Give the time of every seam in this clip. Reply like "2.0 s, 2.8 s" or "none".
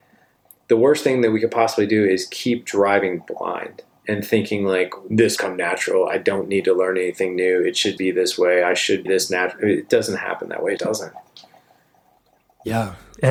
5.4 s, 8.0 s, 9.1 s, 10.8 s